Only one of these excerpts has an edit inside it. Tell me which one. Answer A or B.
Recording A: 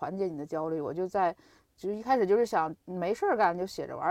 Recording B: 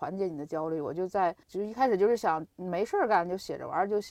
B